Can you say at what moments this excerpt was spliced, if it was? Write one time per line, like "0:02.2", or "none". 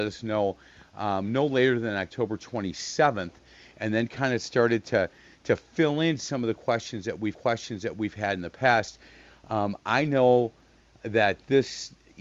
0:07.3